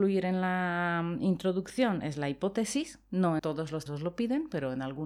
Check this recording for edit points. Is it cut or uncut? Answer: cut